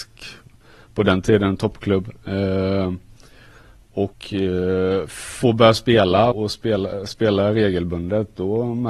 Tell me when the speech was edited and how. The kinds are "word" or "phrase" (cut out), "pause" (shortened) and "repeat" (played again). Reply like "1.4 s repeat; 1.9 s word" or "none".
4.1 s pause; 6.3 s word